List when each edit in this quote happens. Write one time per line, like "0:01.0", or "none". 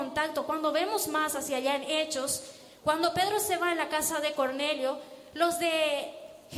none